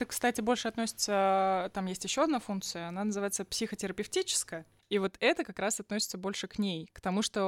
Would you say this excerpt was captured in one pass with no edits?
yes; 0 cuts

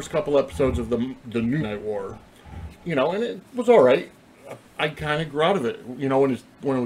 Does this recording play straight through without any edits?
no; 4 cuts; at 1.6 s, 2.8 s, 3.5 s, 4.6 s

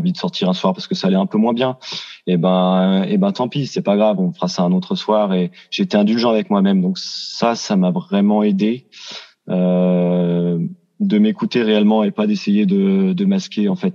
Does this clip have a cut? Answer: no; 0 cuts

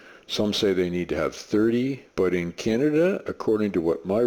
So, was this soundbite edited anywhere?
yes; 1 cut; at 2.1 s

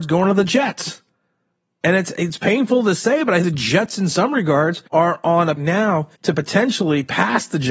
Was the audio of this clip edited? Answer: yes; 5 cuts; at 1.6 s, 3.4 s, 4.9 s, 5.6 s, 6.2 s

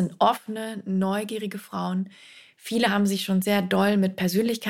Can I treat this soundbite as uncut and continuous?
yes; 0 cuts

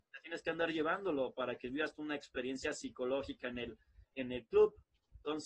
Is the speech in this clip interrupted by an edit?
no; 0 cuts

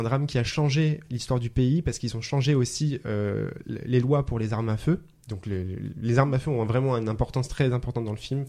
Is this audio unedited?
yes; 0 cuts

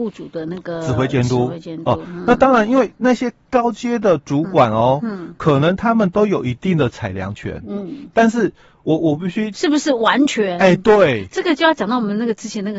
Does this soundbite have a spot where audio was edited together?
no; 0 cuts

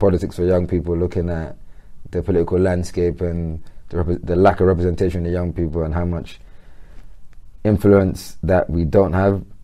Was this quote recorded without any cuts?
yes; 0 cuts

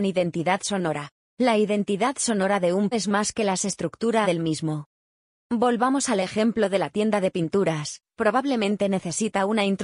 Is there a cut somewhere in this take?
yes; 3 cuts; at 1.2 s, 2.9 s, 4.2 s

